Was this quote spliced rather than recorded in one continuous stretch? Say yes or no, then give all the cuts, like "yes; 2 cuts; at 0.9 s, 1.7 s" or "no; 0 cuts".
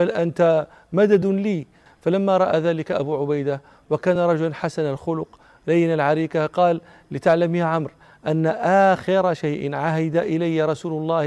no; 0 cuts